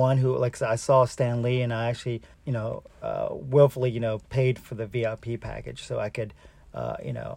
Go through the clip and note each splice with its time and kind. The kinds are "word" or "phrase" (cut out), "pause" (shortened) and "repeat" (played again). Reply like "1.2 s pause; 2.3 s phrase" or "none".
2.3 s pause; 2.9 s pause

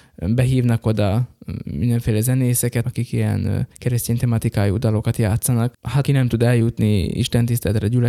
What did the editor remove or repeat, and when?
2.8 s word; 3.7 s pause; 6.0 s word

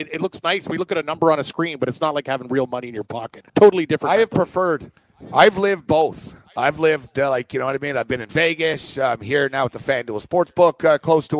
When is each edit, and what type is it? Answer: 3.5 s pause

